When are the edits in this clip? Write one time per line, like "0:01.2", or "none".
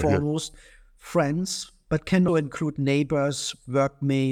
0:02.3